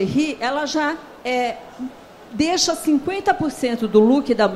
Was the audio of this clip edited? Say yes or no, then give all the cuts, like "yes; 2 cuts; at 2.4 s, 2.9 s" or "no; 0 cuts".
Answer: no; 0 cuts